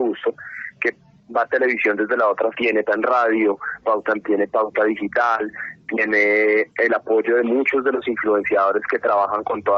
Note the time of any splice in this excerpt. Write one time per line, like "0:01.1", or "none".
0:01.5
0:02.5
0:02.9
0:03.8
0:04.2
0:06.7

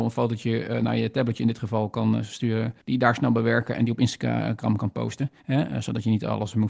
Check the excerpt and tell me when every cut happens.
0:02.8
0:05.4

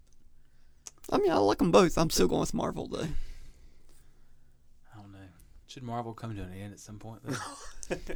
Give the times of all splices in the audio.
0:05.6

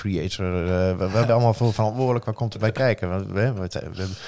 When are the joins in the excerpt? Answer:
0:01.3

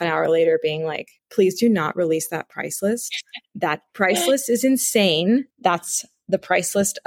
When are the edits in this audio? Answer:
0:01.2
0:05.5

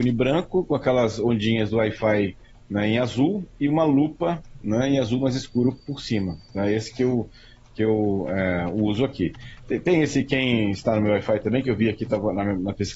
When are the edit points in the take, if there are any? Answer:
none

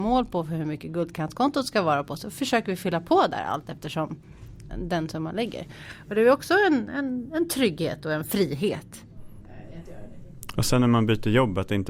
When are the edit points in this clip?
0:04.7

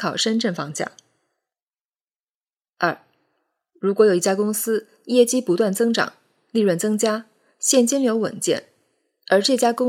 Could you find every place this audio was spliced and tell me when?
none

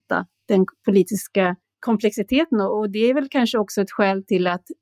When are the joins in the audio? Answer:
0:01.6

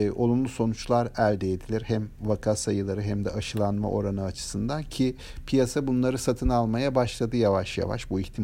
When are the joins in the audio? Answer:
none

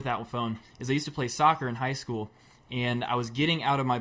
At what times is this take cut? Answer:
none

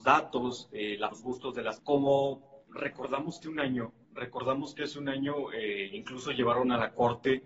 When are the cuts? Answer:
0:01.1
0:01.8
0:02.7
0:03.4
0:04.0

